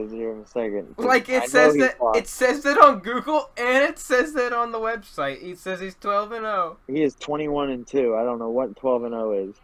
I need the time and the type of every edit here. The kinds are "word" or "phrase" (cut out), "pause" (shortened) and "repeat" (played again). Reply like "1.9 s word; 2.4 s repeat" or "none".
6.8 s pause